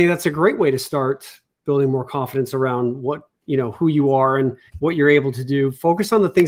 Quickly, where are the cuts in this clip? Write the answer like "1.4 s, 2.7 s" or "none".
4.7 s